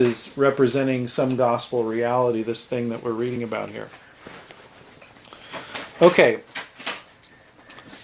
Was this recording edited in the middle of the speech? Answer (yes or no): no